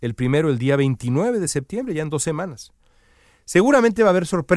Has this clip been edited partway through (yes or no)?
no